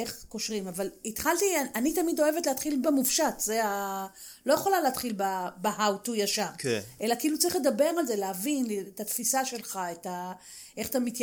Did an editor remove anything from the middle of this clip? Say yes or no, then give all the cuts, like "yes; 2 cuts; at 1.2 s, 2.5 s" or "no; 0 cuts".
yes; 1 cut; at 2.8 s